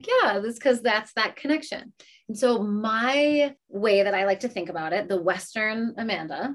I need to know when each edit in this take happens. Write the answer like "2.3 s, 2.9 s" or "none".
3.6 s